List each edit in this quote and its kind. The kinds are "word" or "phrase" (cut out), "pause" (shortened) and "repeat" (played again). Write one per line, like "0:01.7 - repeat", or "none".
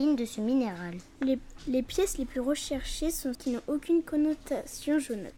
0:01.6 - word
0:03.3 - word